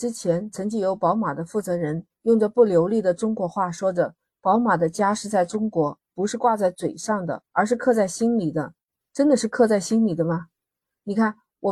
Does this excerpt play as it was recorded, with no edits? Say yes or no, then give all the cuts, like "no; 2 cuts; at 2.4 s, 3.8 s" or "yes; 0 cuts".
no; 3 cuts; at 2.1 s, 7.5 s, 9.0 s